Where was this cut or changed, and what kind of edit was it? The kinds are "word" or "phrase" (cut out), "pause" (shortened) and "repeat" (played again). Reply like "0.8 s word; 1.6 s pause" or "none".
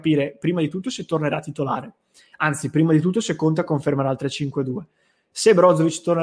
none